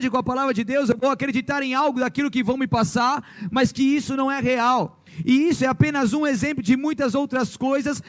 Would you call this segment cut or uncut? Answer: uncut